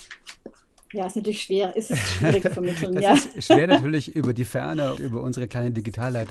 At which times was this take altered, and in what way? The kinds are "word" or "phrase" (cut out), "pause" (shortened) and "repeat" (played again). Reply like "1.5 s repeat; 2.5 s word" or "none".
2.4 s word; 5.0 s word

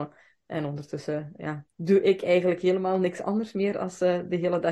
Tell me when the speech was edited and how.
1.7 s pause

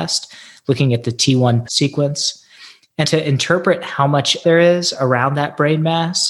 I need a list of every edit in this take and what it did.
1.7 s word; 3.0 s word; 4.4 s word

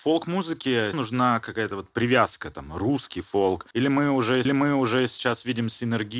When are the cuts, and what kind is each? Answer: 0.9 s phrase; 3.2 s phrase; 3.7 s pause; 4.4 s repeat

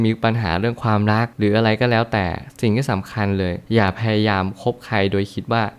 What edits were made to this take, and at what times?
1.3 s pause; 3.6 s pause

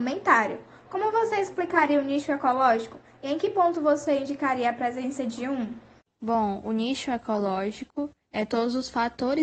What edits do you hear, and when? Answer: 6.0 s pause; 8.2 s pause

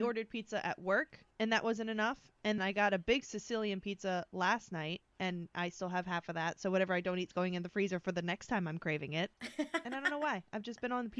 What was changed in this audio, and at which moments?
1.3 s pause; 2.6 s word; 9.3 s pause

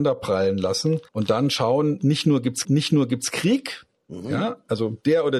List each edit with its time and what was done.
1.1 s pause; 2.6 s repeat

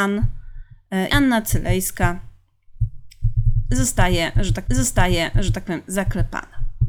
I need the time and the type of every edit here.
1.1 s word; 4.7 s repeat

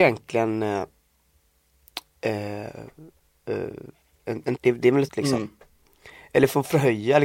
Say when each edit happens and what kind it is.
2.1 s pause; 4.6 s word; 5.1 s word

